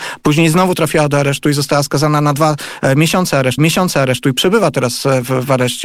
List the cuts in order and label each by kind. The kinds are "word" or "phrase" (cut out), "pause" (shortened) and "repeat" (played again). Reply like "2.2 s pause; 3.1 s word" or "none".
3.6 s repeat